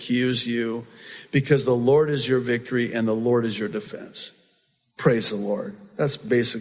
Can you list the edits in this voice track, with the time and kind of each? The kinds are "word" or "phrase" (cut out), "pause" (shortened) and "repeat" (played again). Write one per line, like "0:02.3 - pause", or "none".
none